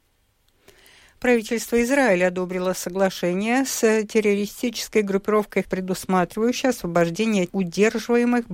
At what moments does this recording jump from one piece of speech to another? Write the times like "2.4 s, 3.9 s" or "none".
5.6 s, 7.5 s